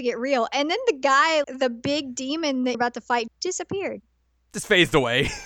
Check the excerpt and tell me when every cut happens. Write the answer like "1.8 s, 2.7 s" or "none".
1.4 s, 2.7 s, 3.3 s

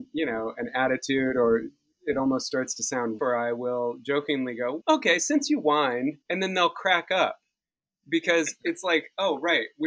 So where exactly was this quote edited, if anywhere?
3.2 s, 4.8 s, 6.2 s

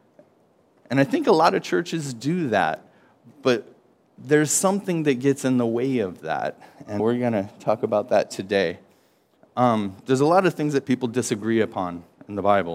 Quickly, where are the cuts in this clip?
7.0 s

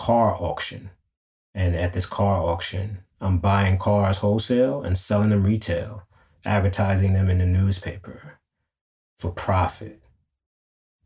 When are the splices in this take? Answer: none

